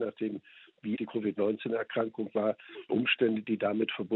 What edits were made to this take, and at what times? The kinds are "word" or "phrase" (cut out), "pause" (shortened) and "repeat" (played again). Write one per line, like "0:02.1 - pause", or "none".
0:01.0 - word
0:02.9 - word